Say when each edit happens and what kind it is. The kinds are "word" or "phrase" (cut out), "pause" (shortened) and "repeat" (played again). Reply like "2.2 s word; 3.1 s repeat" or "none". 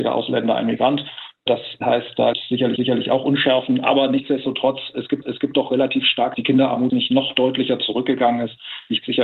2.3 s word; 2.8 s repeat; 5.2 s repeat; 6.3 s phrase; 6.9 s word